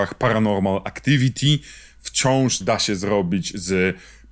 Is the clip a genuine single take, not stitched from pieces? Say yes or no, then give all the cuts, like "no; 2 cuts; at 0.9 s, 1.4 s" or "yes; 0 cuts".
no; 1 cut; at 2.6 s